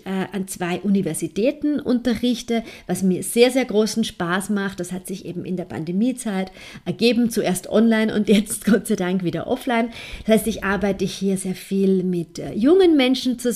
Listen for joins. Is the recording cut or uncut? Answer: uncut